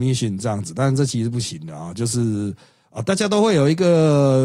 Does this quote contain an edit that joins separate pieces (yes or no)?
no